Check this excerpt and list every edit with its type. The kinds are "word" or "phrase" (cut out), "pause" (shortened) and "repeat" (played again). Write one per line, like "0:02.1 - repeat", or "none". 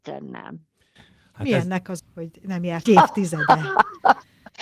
0:02.0 - word
0:02.9 - phrase